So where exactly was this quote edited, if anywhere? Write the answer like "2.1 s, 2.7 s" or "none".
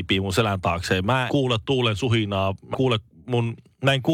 1.3 s, 2.7 s